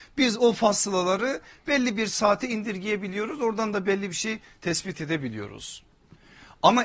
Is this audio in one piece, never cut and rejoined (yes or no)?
yes